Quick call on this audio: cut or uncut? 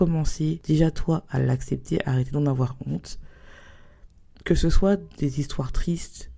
uncut